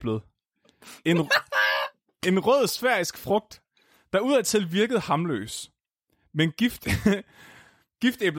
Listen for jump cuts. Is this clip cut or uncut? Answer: uncut